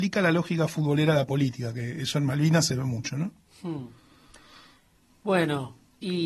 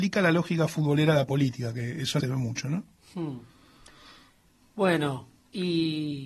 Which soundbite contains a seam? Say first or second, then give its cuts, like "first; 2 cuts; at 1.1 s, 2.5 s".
second; 1 cut; at 2.2 s